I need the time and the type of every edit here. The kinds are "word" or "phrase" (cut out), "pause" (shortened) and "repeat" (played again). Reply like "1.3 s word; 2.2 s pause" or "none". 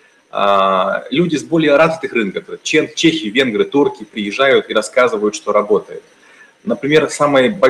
none